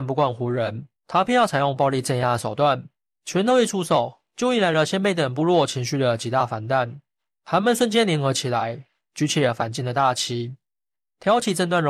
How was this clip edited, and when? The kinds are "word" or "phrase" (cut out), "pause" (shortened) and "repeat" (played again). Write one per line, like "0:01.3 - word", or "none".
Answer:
0:01.0 - pause